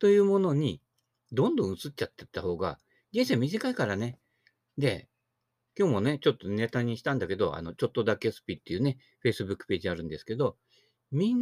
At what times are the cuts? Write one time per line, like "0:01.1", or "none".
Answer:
none